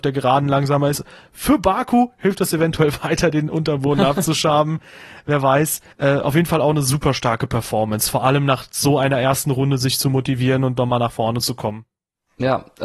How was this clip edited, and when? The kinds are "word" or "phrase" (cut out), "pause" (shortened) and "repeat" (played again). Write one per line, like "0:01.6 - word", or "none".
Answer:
0:05.9 - pause